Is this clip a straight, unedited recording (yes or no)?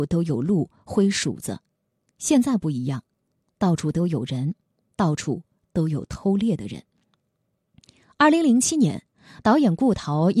yes